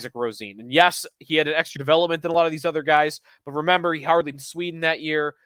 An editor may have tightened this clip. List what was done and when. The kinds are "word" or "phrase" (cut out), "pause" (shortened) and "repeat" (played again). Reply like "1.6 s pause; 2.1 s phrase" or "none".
1.8 s word; 4.3 s word